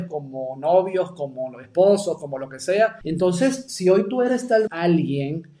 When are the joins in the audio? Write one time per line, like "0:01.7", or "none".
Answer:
0:04.7